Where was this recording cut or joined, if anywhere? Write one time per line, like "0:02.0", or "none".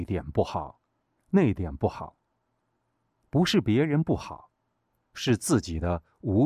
none